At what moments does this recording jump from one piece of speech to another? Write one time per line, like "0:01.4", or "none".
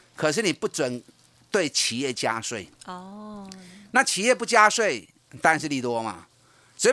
none